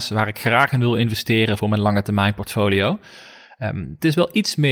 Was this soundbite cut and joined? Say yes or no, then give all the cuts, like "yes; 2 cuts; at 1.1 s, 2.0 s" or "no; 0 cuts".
no; 0 cuts